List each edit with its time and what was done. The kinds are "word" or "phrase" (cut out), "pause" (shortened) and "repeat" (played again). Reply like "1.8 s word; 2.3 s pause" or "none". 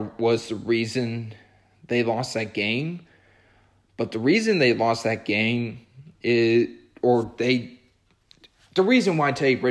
none